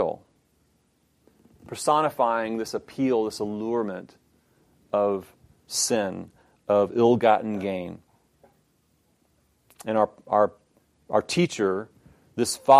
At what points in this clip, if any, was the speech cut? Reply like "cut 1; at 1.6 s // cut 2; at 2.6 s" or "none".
none